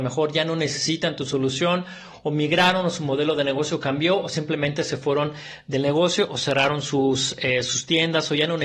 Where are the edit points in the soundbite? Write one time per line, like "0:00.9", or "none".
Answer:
none

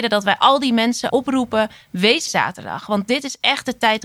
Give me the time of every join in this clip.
0:01.1
0:02.3

